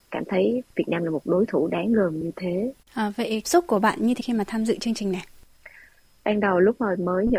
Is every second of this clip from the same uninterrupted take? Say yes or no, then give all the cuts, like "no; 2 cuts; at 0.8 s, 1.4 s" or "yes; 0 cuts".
no; 3 cuts; at 2.8 s, 3.4 s, 4.2 s